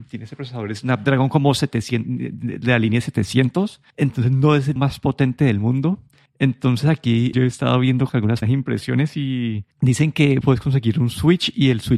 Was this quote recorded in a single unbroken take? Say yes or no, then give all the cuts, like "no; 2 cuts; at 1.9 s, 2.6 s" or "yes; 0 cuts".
no; 8 cuts; at 3.9 s, 4.8 s, 6.3 s, 7.3 s, 8.1 s, 8.4 s, 9.7 s, 10.4 s